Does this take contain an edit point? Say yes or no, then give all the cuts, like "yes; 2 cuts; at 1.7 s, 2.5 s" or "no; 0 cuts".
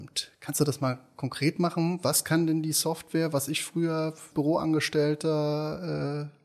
yes; 1 cut; at 4.3 s